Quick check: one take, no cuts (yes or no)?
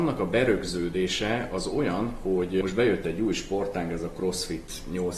yes